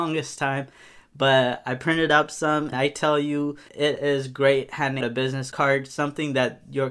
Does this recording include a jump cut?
yes; 3 cuts; at 2.7 s, 3.7 s, 5.0 s

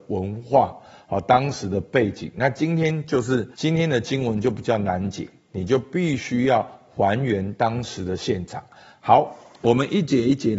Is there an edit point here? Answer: yes; 1 cut; at 3.5 s

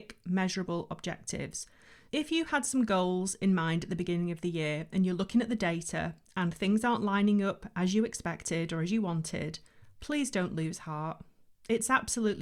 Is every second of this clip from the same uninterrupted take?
yes; 0 cuts

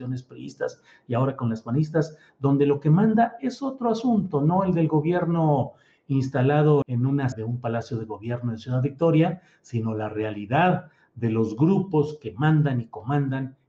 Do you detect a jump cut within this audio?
yes; 2 cuts; at 6.8 s, 7.3 s

